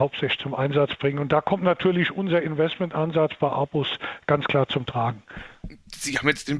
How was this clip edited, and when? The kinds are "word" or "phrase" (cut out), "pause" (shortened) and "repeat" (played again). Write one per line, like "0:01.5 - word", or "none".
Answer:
none